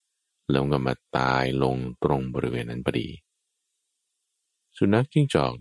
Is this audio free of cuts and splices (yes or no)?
no